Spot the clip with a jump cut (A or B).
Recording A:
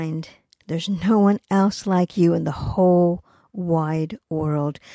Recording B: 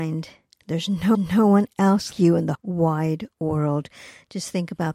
B